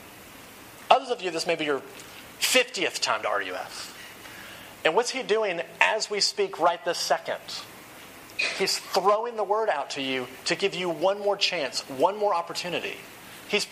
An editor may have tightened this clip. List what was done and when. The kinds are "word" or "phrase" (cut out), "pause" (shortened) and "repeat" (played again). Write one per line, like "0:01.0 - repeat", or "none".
none